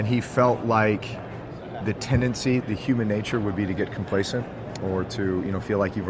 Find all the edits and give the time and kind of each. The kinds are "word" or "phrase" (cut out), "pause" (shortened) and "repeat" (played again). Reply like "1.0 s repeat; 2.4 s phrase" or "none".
1.8 s word; 2.6 s word

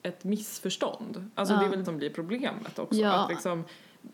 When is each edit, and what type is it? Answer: 1.8 s word

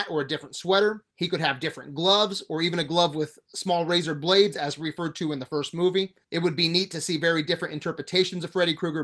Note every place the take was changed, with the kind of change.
1.1 s pause; 6.2 s pause

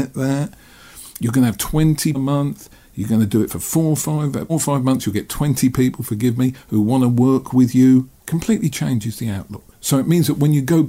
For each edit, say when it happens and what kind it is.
2.1 s word; 4.5 s phrase; 8.2 s pause

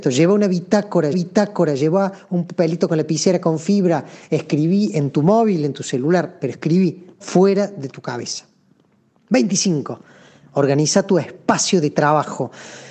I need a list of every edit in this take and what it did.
1.1 s repeat; 7.2 s word

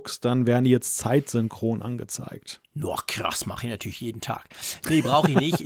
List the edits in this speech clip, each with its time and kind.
none

